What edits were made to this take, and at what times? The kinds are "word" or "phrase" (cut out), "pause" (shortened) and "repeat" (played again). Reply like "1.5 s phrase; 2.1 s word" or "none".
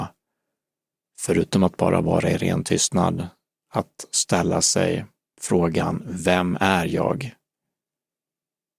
none